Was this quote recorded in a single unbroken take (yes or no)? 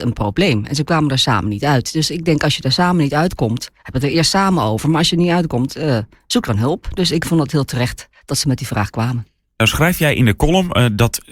yes